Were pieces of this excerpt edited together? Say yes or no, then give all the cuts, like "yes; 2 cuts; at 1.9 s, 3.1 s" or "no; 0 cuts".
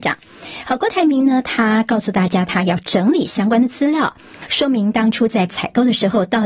yes; 1 cut; at 5.5 s